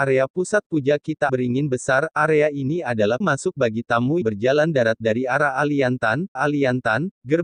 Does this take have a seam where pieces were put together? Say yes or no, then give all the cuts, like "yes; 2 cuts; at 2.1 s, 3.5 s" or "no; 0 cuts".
yes; 4 cuts; at 1.3 s, 3.2 s, 4.2 s, 6.4 s